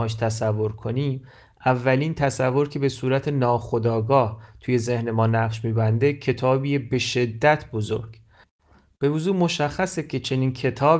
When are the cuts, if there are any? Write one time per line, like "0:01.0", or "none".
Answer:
none